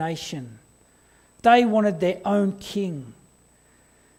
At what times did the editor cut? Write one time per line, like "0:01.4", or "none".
none